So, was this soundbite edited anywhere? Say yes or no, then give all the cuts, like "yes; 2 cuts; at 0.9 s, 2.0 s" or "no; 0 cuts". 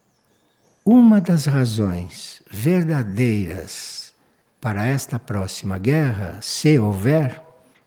no; 0 cuts